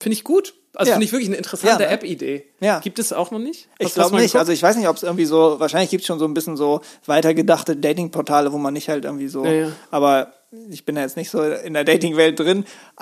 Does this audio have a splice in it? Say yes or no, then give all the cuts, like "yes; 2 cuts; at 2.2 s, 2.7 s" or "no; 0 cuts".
no; 0 cuts